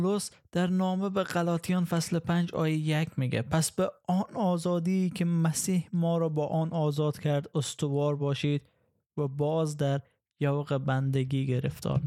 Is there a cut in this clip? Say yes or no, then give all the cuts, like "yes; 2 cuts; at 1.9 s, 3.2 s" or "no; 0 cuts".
no; 0 cuts